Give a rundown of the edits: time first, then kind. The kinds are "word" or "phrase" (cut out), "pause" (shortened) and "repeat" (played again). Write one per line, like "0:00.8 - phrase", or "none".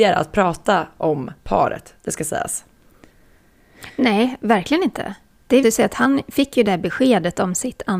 0:05.6 - word